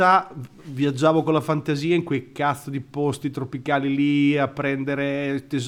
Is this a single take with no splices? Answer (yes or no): yes